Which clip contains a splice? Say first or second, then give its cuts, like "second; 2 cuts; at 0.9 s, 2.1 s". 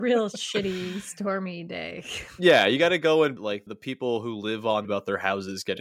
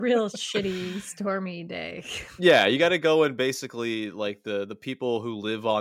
first; 3 cuts; at 3.4 s, 3.7 s, 4.8 s